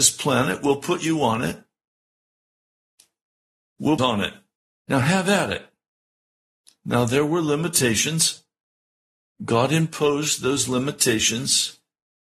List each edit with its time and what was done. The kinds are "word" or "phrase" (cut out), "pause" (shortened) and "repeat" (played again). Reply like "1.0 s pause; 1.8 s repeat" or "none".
4.0 s phrase; 4.6 s pause